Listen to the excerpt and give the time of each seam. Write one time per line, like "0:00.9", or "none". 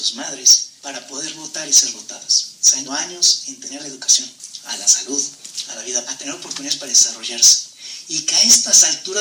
0:02.8
0:03.8
0:06.0